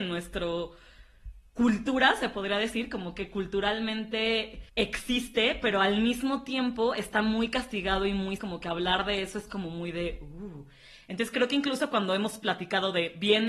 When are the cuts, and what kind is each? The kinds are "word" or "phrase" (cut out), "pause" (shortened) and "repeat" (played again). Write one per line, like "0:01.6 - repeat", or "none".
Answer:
0:01.5 - pause
0:04.7 - pause
0:08.4 - phrase